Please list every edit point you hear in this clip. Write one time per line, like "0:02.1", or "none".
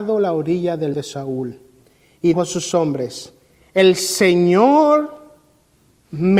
0:00.9
0:02.3

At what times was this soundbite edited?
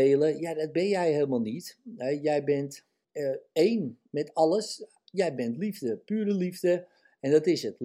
0:03.0

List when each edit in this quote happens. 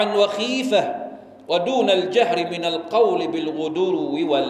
none

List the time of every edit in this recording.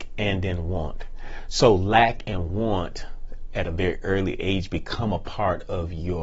none

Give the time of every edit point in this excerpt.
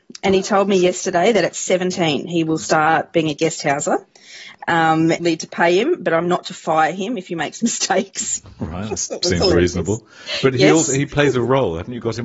0:05.2

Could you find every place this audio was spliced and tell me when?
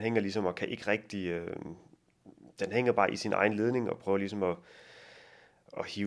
none

